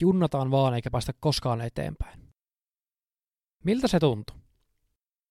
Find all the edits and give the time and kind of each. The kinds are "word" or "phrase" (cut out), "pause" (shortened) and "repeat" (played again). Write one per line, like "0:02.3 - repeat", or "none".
none